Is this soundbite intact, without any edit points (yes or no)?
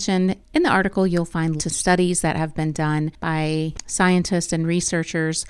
no